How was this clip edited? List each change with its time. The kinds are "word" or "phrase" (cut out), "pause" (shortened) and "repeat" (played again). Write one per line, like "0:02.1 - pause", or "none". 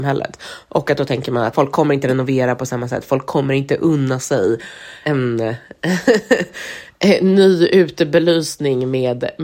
0:01.5 - word
0:05.0 - word